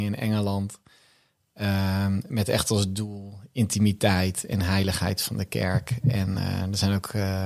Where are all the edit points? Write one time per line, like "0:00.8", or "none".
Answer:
none